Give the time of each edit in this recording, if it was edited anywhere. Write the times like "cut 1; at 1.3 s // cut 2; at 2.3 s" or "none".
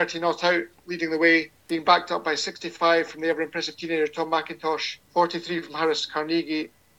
cut 1; at 1.6 s // cut 2; at 5.0 s